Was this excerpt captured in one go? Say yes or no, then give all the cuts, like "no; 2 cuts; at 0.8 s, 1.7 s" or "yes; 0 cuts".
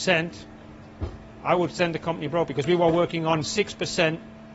yes; 0 cuts